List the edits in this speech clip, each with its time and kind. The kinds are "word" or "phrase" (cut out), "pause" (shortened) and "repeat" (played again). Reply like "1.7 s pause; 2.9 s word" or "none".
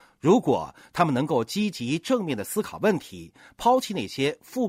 none